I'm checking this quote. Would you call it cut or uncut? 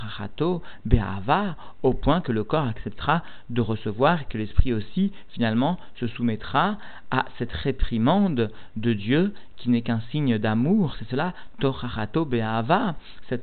uncut